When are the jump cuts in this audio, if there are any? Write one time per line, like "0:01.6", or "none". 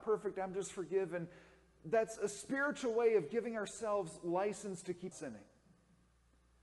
0:05.1